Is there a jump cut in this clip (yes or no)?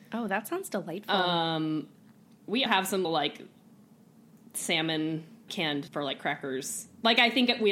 yes